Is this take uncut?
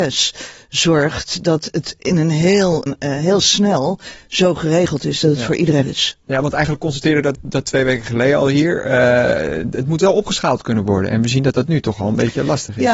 no; 3 cuts; at 2.9 s, 5.8 s, 7.3 s

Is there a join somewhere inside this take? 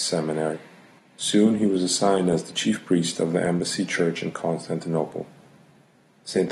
yes; 1 cut; at 1.0 s

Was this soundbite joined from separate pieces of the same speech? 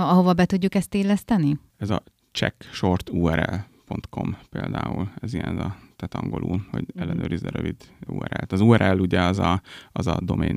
no; 0 cuts

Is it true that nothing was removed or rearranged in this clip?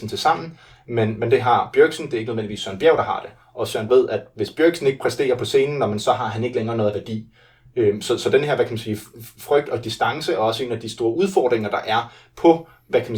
no; 1 cut; at 3.9 s

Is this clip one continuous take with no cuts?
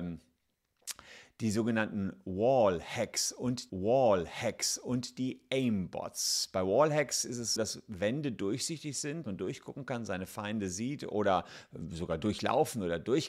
no; 3 cuts; at 3.7 s, 7.6 s, 9.2 s

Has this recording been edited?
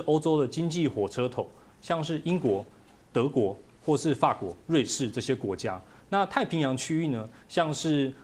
no; 0 cuts

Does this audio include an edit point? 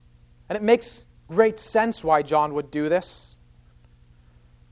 no; 0 cuts

